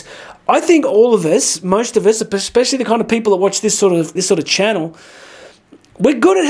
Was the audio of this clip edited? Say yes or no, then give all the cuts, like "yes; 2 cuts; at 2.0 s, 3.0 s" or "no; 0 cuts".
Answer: yes; 1 cut; at 4.2 s